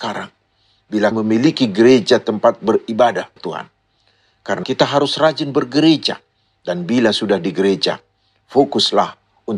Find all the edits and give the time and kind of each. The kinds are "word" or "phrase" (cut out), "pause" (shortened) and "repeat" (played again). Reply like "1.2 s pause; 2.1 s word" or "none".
1.1 s word; 3.4 s word; 4.6 s word